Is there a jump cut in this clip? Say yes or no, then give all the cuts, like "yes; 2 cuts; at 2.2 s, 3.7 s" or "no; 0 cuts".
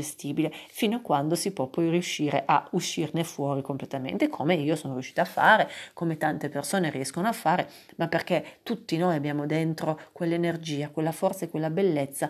no; 0 cuts